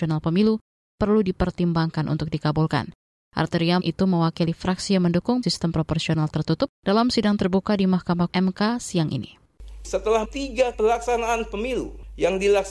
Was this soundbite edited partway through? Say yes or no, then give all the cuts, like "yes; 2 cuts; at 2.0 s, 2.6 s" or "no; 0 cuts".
yes; 6 cuts; at 3.8 s, 5.4 s, 6.7 s, 8.3 s, 10.2 s, 10.7 s